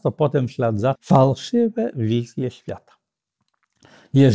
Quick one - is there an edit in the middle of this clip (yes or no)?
yes